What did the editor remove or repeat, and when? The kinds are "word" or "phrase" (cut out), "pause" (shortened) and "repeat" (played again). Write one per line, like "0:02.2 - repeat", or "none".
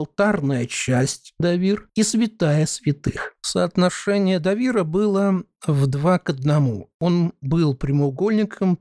0:03.4 - pause